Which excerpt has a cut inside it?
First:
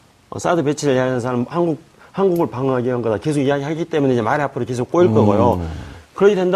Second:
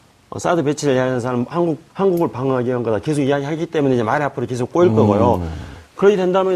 second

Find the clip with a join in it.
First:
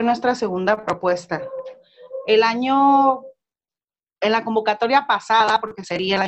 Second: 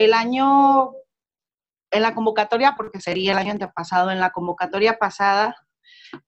second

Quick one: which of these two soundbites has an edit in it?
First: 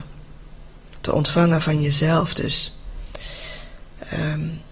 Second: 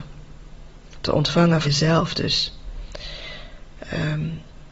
second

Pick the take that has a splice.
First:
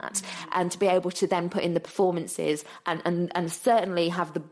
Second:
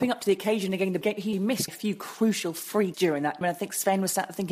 second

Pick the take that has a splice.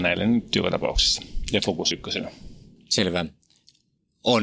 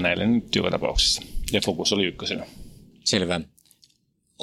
first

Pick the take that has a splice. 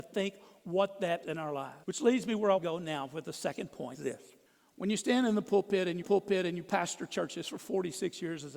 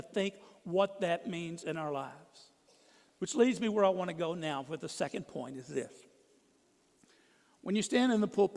first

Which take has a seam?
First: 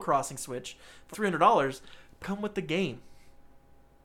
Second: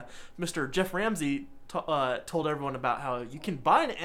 first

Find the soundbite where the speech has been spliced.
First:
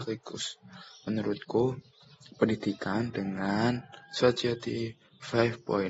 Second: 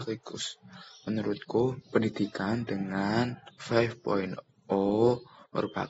second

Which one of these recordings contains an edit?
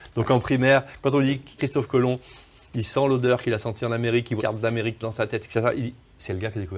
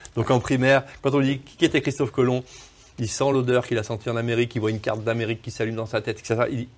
first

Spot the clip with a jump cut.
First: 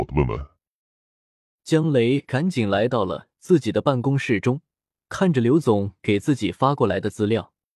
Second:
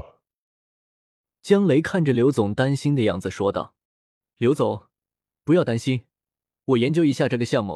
second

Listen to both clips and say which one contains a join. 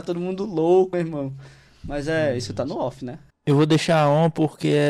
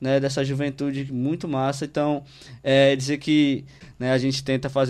first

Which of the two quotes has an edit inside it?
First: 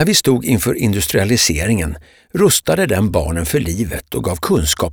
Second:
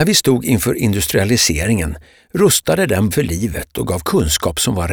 second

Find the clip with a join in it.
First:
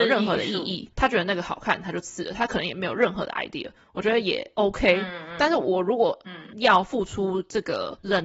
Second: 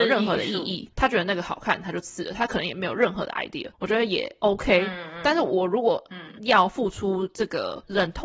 second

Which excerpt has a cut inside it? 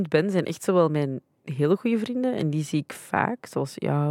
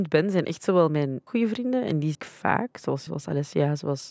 second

